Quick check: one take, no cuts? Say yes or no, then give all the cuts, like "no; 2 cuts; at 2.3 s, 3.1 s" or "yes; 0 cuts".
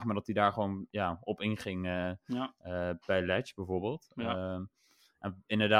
yes; 0 cuts